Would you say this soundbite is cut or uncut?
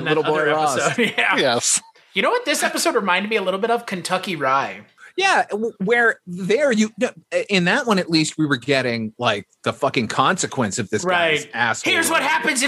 uncut